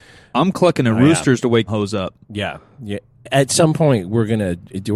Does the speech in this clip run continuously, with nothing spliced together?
no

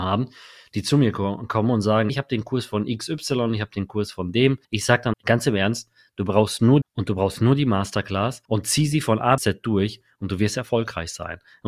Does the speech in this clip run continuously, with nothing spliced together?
no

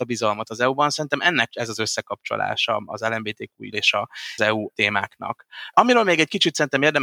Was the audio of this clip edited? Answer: yes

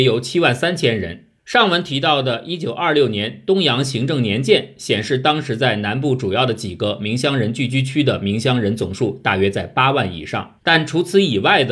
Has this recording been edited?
yes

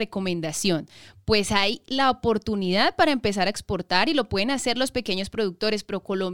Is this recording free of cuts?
yes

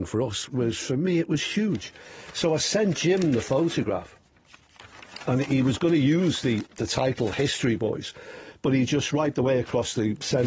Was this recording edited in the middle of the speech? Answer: no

